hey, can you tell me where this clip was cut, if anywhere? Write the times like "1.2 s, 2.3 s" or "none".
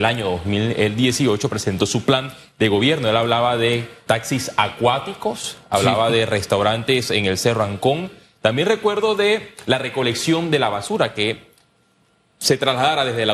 4.1 s